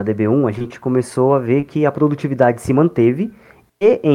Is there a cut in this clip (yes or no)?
no